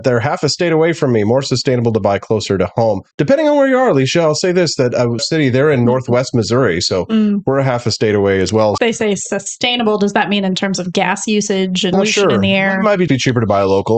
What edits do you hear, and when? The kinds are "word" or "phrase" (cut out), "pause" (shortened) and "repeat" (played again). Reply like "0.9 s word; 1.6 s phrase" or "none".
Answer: 3.1 s pause; 5.2 s phrase; 8.8 s word; 11.9 s word; 13.1 s word